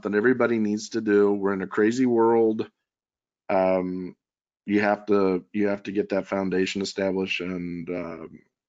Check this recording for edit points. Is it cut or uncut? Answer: uncut